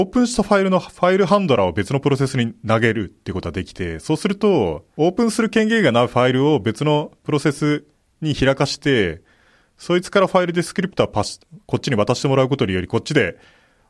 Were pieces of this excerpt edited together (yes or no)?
no